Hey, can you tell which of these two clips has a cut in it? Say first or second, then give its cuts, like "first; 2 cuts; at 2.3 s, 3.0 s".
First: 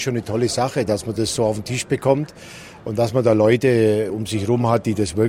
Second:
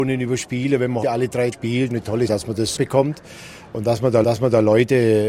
second; 6 cuts; at 1.0 s, 1.5 s, 1.9 s, 2.3 s, 2.8 s, 4.2 s